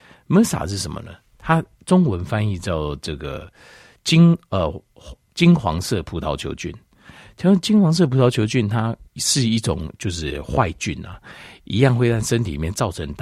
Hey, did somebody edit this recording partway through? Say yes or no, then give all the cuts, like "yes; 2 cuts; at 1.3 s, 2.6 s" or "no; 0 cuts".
yes; 1 cut; at 9.1 s